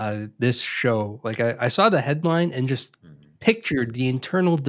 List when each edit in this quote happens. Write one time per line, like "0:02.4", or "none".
none